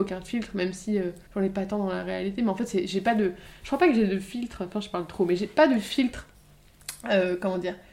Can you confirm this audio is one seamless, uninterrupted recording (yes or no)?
no